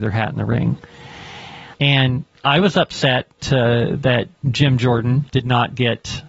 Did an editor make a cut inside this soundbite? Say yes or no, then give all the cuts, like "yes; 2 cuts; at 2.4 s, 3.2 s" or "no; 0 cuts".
yes; 3 cuts; at 1.7 s, 3.4 s, 5.3 s